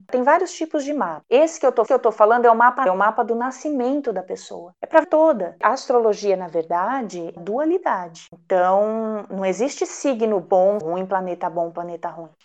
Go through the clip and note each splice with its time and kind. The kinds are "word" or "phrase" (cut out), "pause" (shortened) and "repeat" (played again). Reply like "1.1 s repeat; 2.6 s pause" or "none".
1.9 s repeat; 2.9 s word; 5.0 s word; 7.4 s phrase; 10.8 s word